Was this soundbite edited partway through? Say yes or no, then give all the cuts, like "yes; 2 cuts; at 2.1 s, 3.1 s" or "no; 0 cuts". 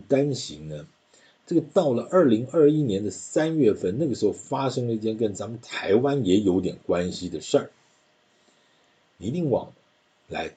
no; 0 cuts